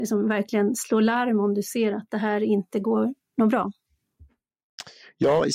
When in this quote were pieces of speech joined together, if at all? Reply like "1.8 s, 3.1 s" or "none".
none

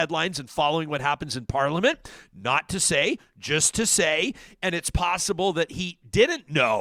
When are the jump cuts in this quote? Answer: none

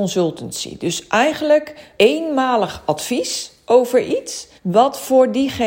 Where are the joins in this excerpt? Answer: 2.0 s, 4.6 s

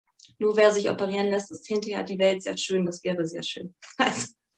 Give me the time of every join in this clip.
none

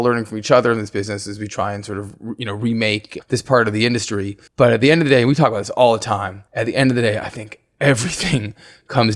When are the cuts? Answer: 4.5 s, 6.5 s

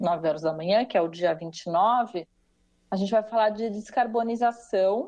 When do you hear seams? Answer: none

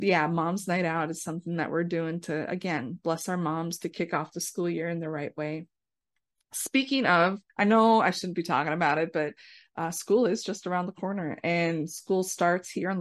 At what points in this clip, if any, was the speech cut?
7.5 s

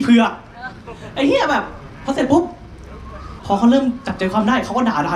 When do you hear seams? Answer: 3.4 s

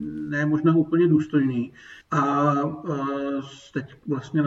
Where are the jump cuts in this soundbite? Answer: 2.0 s

